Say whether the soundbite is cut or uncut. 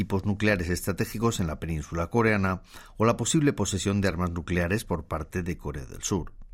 uncut